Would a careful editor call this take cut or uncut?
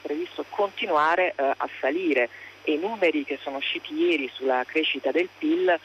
uncut